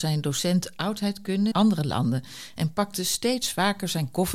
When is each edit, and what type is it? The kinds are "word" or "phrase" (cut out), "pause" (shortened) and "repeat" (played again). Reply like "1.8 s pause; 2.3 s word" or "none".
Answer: 1.5 s phrase